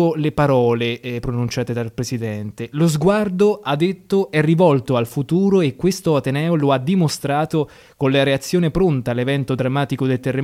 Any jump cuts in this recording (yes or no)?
no